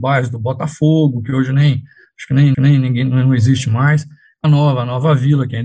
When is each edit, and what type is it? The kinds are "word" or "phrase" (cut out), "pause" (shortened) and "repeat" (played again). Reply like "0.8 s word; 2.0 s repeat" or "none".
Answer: 2.5 s repeat; 4.4 s word